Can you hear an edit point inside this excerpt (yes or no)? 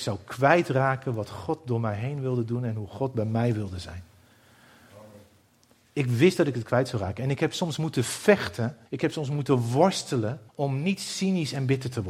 yes